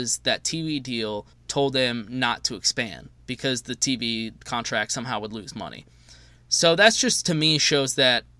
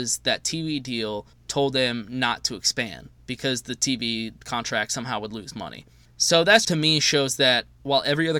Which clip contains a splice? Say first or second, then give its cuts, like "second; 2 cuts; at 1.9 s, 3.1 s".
second; 2 cuts; at 6.1 s, 6.6 s